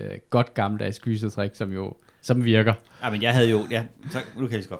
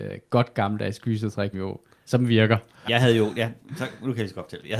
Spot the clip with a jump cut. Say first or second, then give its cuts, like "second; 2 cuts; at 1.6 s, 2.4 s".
second; 2 cuts; at 1.5 s, 2.9 s